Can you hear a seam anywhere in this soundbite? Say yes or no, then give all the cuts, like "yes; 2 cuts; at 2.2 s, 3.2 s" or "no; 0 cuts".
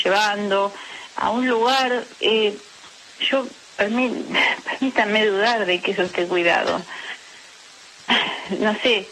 yes; 2 cuts; at 1.1 s, 2.1 s